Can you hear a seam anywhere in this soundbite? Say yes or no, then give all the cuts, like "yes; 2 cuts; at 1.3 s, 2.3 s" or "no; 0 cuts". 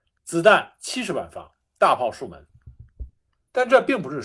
no; 0 cuts